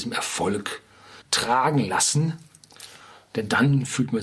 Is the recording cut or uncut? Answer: cut